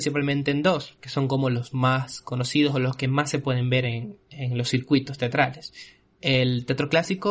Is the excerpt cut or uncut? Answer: uncut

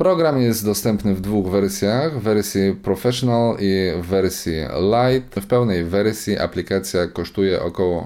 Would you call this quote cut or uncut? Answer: uncut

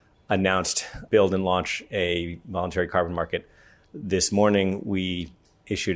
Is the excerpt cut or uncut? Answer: cut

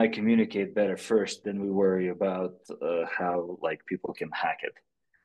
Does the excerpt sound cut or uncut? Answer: uncut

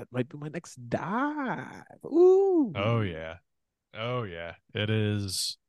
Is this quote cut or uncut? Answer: uncut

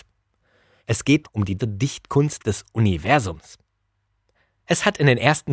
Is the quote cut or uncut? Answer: cut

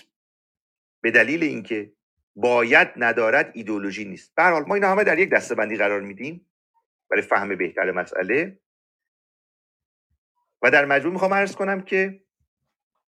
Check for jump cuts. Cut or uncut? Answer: uncut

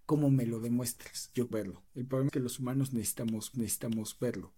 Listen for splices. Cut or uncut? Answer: cut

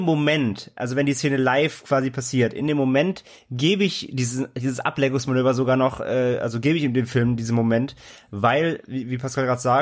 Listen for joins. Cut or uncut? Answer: uncut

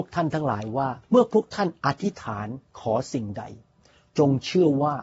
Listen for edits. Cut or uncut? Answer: cut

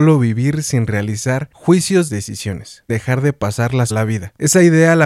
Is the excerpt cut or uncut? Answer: cut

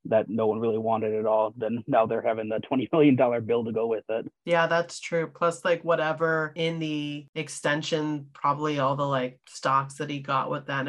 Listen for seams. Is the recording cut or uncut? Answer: cut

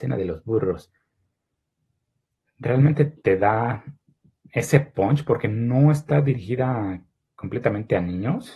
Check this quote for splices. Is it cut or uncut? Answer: uncut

